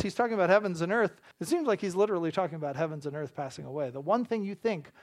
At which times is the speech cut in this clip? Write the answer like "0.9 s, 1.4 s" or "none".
1.3 s